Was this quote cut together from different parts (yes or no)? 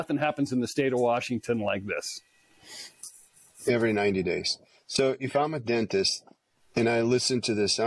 no